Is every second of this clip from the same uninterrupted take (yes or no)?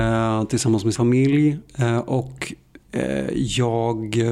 no